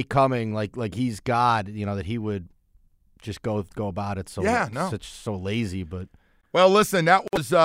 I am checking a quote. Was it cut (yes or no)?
no